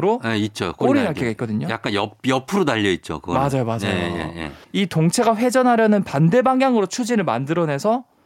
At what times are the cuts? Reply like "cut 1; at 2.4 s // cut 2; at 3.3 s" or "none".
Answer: cut 1; at 4.6 s